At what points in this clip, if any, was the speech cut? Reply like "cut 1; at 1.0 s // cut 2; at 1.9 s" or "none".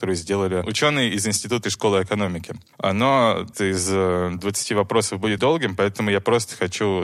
cut 1; at 1.6 s // cut 2; at 3.5 s // cut 3; at 5.4 s